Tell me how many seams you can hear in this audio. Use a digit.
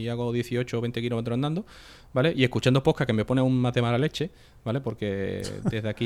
0